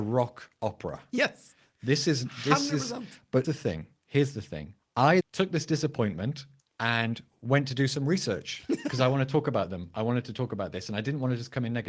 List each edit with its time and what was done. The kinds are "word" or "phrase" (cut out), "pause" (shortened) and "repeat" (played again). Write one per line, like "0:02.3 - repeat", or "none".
0:03.4 - word
0:05.2 - word